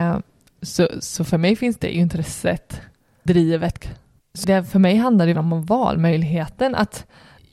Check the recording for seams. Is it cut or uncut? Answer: cut